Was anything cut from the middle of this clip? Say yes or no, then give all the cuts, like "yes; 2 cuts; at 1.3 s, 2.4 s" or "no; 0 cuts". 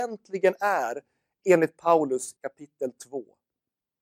yes; 1 cut; at 2.4 s